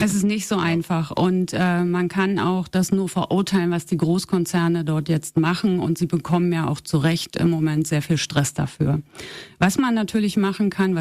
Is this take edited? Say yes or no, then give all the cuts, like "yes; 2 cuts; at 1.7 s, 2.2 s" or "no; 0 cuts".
no; 0 cuts